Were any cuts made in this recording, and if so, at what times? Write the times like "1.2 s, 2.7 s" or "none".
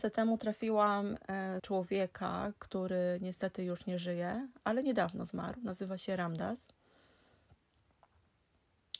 1.6 s

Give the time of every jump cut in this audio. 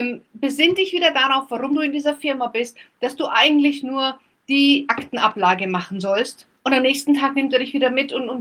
6.6 s

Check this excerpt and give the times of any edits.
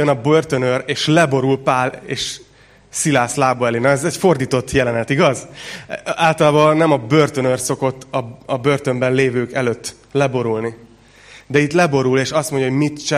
none

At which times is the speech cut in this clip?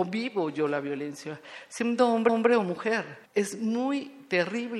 2.3 s, 3.3 s

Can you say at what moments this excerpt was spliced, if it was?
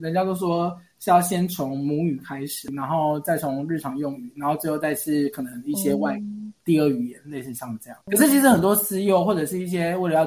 6.6 s, 8.0 s

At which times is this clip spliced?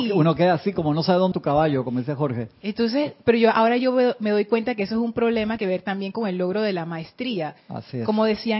1.3 s, 5.6 s, 7.6 s

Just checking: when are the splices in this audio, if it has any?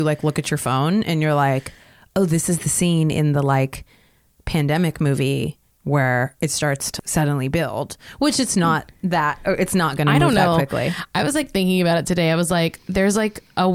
7.0 s

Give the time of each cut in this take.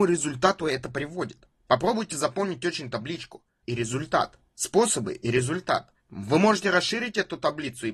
1.5 s, 2.9 s, 3.6 s, 4.5 s, 6.0 s

